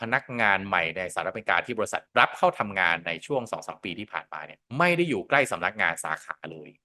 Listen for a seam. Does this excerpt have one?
yes; 2 cuts; at 2.1 s, 4.7 s

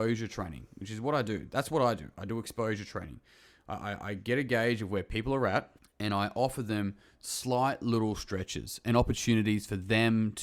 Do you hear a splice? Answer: yes; 1 cut; at 5.8 s

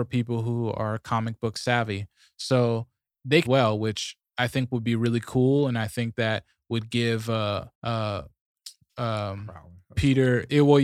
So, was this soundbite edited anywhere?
yes; 2 cuts; at 3.4 s, 7.7 s

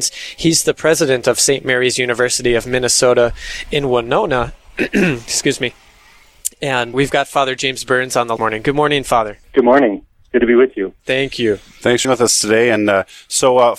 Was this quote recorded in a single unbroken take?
no; 6 cuts; at 6.9 s, 8.4 s, 9.4 s, 10.1 s, 11.0 s, 12.0 s

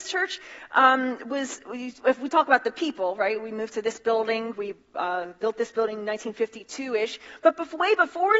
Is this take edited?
no; 0 cuts

